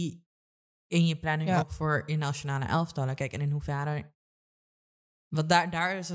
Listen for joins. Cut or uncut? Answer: uncut